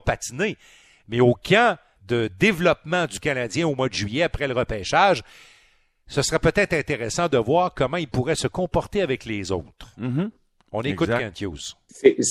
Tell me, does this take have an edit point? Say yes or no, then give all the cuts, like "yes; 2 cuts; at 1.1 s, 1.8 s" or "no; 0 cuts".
yes; 1 cut; at 2.0 s